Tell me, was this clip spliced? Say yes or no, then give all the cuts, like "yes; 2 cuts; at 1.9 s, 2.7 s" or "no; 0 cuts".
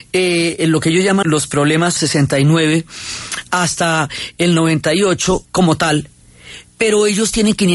yes; 3 cuts; at 1.2 s, 2.0 s, 5.4 s